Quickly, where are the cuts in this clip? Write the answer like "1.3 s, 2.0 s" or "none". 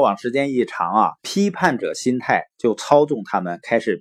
1.2 s

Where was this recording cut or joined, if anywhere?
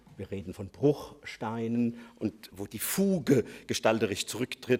none

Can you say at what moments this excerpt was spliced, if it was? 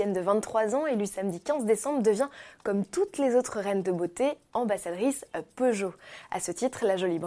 none

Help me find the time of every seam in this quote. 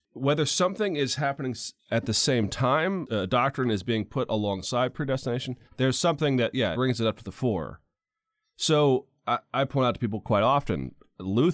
5.7 s, 6.7 s

